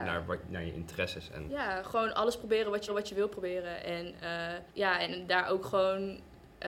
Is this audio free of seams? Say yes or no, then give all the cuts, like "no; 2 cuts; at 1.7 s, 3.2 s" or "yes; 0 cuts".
no; 2 cuts; at 2.9 s, 4.7 s